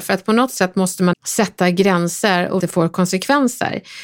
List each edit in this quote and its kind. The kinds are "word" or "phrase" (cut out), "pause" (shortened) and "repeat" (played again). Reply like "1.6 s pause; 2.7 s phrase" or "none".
1.1 s word; 2.6 s phrase